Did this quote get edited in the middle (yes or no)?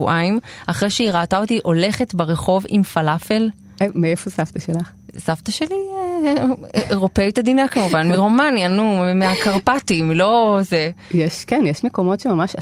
no